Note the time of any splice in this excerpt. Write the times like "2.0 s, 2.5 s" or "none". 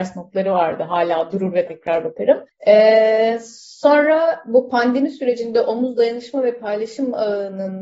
1.7 s, 2.5 s

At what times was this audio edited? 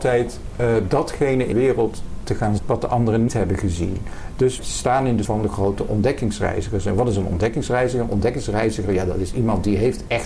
1.5 s, 2.6 s, 3.3 s, 4.6 s, 5.2 s

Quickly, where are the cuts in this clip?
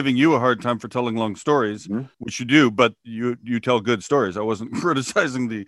2.1 s

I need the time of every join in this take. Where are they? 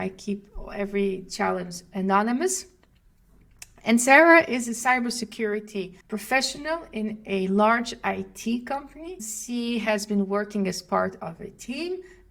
6.0 s

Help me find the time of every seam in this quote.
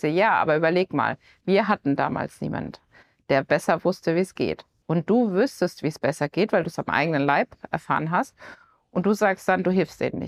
none

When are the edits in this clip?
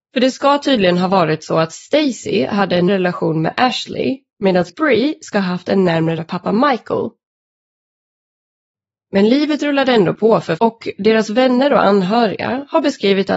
2.9 s, 4.7 s, 6.2 s, 10.6 s

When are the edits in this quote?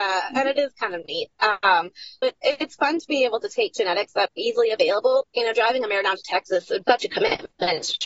2.2 s, 4.3 s, 5.2 s, 6.8 s

